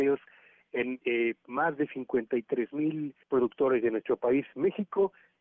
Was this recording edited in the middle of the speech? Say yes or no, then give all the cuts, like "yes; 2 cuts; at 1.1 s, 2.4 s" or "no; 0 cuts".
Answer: yes; 1 cut; at 3.2 s